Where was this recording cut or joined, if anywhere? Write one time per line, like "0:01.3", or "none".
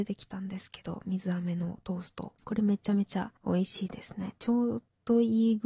0:02.4
0:03.4